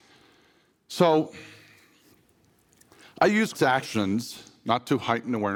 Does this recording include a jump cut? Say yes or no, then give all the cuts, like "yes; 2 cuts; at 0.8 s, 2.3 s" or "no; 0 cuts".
yes; 1 cut; at 3.5 s